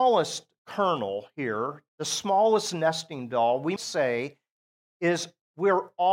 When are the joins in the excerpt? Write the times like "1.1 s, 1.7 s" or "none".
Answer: 1.9 s, 3.8 s

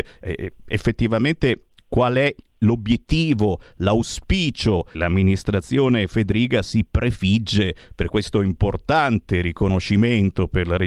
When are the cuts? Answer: 4.9 s

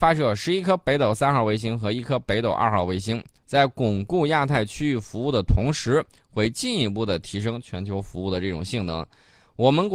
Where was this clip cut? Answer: none

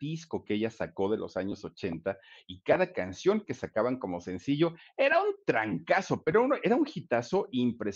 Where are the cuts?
none

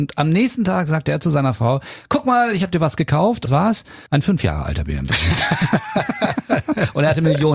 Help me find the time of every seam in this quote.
3.5 s, 4.1 s

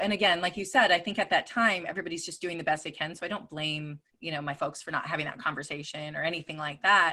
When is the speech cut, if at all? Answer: 4.1 s

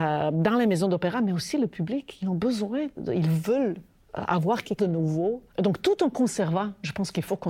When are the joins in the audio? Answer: 3.0 s, 4.8 s

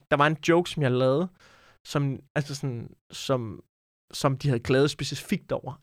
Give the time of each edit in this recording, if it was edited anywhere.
none

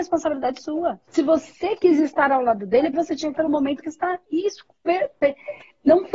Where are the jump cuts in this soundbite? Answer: 1.1 s, 2.9 s, 3.3 s, 3.8 s

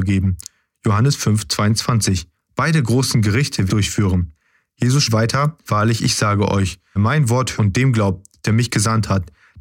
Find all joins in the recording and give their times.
2.3 s, 3.7 s, 5.1 s, 5.7 s, 7.0 s, 7.6 s

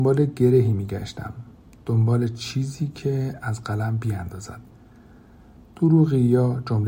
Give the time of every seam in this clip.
none

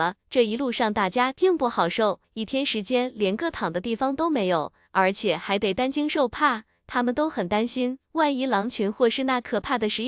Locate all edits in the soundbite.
2.2 s

